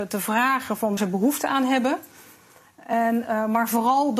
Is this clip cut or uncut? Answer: cut